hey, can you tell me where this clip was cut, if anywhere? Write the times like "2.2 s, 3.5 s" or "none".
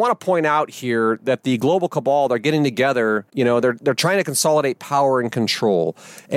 3.3 s